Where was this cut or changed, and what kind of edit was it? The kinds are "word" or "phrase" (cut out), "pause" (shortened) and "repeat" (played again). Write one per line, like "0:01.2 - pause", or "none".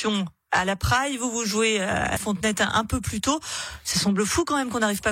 0:02.2 - word